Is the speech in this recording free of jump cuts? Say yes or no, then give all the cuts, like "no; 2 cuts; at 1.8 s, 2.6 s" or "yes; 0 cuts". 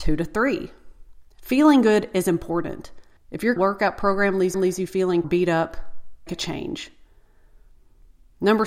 no; 6 cuts; at 1.3 s, 3.2 s, 3.6 s, 4.5 s, 5.2 s, 6.3 s